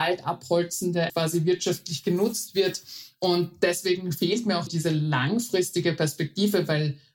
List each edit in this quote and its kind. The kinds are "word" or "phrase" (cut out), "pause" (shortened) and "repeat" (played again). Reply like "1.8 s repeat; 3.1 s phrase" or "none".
1.1 s word; 4.7 s word